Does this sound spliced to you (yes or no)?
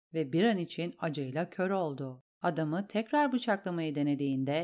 yes